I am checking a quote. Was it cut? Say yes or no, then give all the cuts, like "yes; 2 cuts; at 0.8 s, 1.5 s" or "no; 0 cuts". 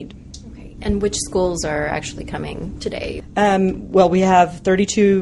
no; 0 cuts